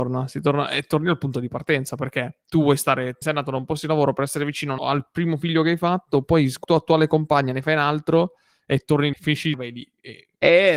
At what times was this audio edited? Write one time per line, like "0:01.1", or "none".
0:03.2
0:04.8
0:06.6
0:09.1
0:09.5